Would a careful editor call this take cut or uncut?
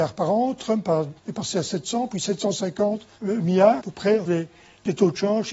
cut